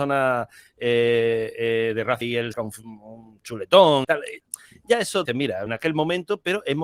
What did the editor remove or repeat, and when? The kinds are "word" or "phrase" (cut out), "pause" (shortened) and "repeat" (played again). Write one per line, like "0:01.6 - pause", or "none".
0:02.2 - word
0:02.5 - word
0:04.0 - word
0:05.3 - word
0:05.7 - word